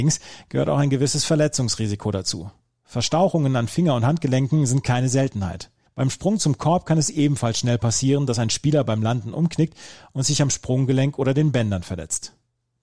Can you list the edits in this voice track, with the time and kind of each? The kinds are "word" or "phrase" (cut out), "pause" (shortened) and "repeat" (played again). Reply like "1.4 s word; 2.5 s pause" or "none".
5.9 s pause